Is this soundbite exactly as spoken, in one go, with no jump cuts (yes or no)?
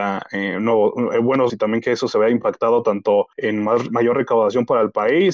no